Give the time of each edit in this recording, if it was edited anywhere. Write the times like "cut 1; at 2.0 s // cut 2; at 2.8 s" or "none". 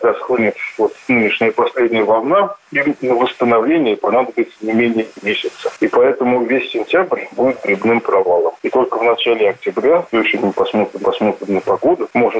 cut 1; at 10.1 s // cut 2; at 11.0 s